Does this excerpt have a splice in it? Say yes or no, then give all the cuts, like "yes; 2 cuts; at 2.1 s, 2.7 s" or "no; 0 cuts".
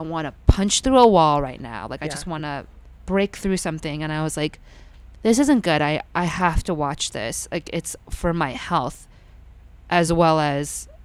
no; 0 cuts